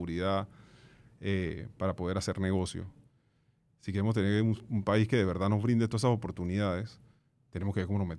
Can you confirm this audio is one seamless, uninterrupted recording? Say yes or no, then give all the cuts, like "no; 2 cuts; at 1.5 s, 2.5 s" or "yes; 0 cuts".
yes; 0 cuts